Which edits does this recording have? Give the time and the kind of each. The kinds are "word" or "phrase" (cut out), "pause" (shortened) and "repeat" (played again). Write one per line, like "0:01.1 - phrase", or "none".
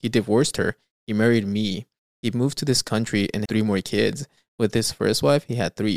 0:03.5 - word